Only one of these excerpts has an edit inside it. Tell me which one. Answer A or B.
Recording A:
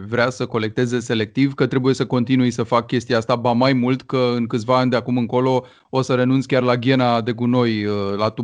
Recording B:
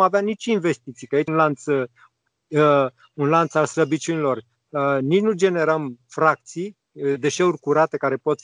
B